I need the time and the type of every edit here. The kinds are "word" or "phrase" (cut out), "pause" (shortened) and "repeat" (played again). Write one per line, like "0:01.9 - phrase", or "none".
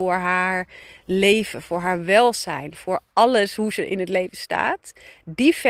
none